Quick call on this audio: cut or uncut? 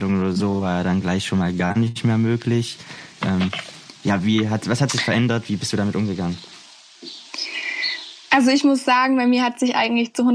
uncut